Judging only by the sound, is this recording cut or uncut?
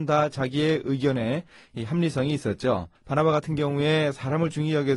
cut